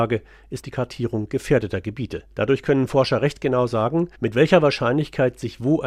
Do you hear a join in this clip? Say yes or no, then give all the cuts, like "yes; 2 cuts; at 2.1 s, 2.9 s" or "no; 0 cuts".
yes; 2 cuts; at 2.3 s, 4.1 s